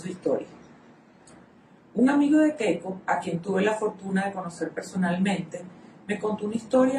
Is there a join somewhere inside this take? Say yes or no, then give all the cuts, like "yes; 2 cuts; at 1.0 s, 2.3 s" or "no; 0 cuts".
no; 0 cuts